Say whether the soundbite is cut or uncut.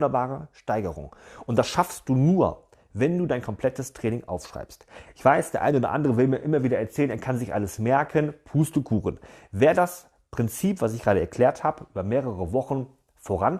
uncut